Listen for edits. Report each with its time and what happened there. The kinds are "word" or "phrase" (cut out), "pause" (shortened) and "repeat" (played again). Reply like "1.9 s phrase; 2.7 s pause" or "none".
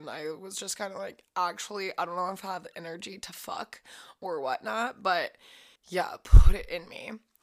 5.8 s pause